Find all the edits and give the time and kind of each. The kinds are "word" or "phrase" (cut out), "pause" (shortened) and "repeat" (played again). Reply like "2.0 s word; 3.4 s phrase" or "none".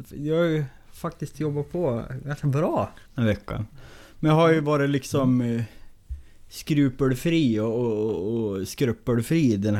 3.1 s pause